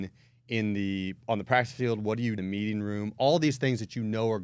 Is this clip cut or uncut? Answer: cut